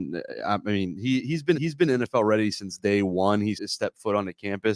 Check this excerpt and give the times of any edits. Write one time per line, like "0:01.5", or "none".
0:01.5
0:03.6